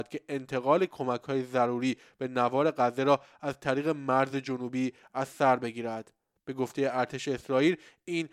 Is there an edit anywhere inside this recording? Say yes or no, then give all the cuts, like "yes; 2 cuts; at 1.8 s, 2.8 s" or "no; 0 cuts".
no; 0 cuts